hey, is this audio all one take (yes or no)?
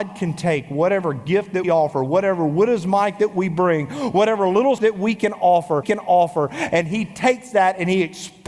no